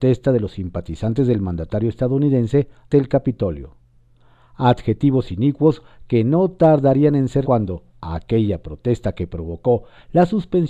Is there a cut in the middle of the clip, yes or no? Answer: yes